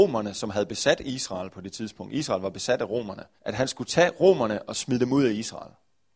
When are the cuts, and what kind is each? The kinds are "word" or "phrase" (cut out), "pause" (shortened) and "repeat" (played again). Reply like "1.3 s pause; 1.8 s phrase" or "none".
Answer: 3.4 s pause